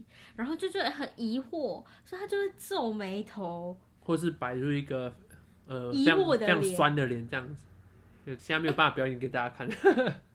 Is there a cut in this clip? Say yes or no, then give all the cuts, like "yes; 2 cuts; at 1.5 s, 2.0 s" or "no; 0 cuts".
yes; 2 cuts; at 4.0 s, 8.4 s